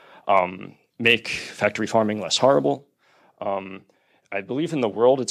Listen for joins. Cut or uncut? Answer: uncut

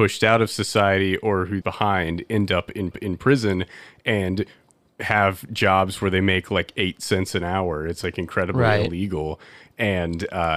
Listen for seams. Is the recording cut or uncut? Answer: cut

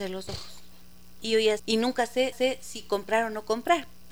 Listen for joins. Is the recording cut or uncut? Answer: cut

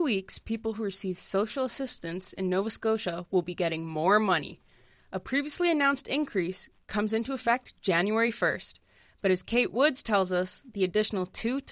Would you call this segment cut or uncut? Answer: uncut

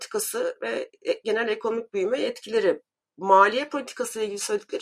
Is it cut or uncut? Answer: uncut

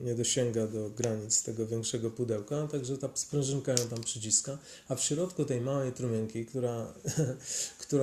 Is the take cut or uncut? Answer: uncut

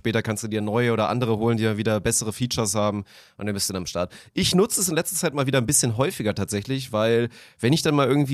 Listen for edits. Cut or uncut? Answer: uncut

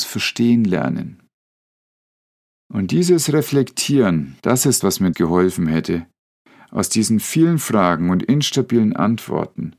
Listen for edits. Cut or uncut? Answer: cut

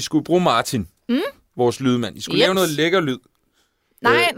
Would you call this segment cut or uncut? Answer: uncut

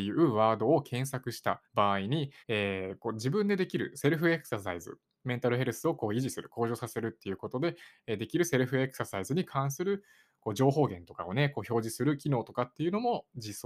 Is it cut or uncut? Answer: cut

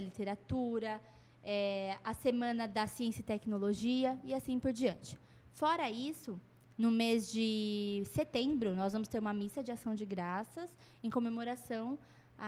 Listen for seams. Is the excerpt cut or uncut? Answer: uncut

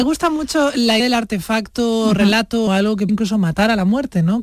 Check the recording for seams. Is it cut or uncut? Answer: cut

